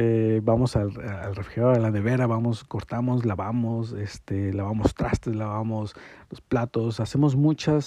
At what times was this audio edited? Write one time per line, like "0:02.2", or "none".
none